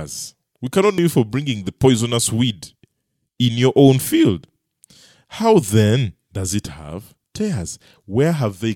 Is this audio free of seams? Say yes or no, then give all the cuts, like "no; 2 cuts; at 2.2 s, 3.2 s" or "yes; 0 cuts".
yes; 0 cuts